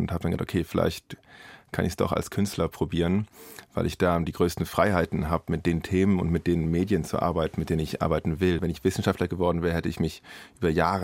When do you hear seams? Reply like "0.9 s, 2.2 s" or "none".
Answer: none

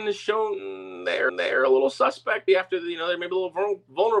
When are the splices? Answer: 1.3 s, 2.5 s

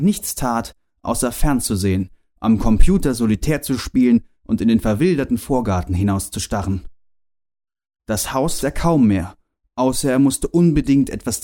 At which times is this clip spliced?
8.6 s

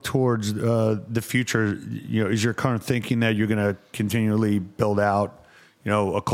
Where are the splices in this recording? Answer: none

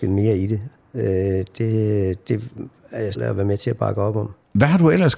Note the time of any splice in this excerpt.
3.2 s

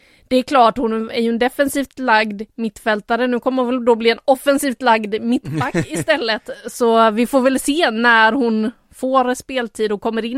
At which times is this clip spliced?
none

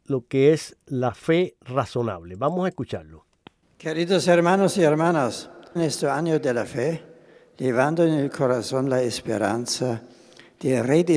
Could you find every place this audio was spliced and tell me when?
5.8 s

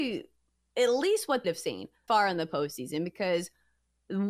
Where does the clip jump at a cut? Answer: 1.4 s, 2.1 s

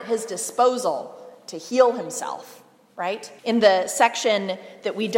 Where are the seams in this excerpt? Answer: 3.4 s

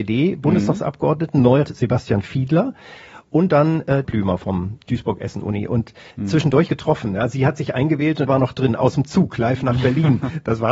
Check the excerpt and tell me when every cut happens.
1.6 s, 4.0 s, 6.1 s, 6.7 s, 8.3 s

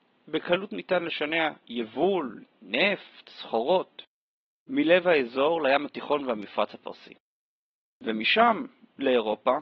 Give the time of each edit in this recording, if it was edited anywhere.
none

